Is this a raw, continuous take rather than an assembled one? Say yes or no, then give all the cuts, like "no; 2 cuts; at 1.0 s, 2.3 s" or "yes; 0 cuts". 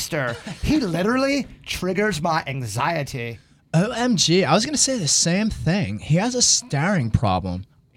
yes; 0 cuts